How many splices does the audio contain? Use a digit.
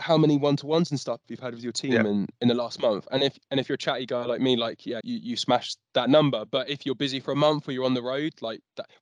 1